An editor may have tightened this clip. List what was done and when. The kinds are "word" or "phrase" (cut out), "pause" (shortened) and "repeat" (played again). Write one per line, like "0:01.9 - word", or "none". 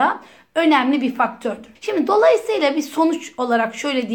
0:01.8 - pause